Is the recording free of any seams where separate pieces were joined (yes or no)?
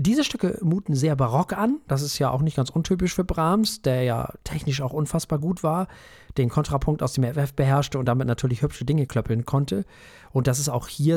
yes